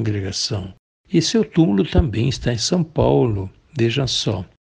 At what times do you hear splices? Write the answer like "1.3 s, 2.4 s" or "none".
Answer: none